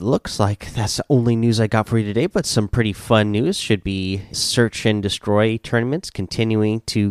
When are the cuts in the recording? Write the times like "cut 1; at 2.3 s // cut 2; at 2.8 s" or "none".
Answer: cut 1; at 4.3 s